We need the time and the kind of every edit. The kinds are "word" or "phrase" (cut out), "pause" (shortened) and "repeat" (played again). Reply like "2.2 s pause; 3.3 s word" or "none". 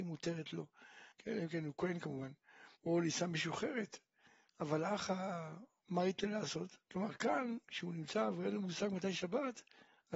1.1 s pause; 2.8 s pause; 6.8 s pause; 7.6 s pause